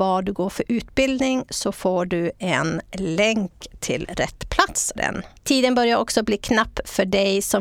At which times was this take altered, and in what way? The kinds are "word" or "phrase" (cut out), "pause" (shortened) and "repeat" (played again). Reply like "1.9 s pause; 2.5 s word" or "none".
5.0 s phrase; 5.4 s pause